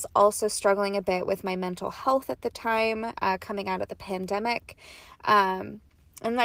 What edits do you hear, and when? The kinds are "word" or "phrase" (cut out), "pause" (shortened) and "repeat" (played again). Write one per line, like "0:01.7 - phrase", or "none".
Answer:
none